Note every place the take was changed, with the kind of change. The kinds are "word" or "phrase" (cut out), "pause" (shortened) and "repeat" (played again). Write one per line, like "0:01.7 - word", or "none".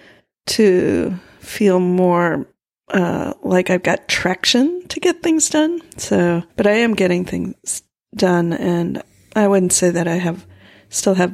0:06.5 - pause